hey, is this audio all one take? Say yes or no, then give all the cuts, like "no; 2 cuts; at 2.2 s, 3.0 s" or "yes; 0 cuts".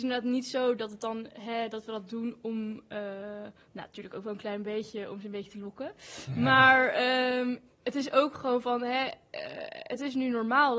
yes; 0 cuts